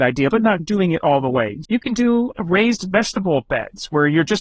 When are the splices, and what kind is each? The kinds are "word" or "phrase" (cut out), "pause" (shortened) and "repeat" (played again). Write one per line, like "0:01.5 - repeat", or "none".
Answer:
0:01.6 - word